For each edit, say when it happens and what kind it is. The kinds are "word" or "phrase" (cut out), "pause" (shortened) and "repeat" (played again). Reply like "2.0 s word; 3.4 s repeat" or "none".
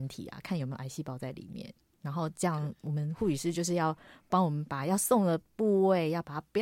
none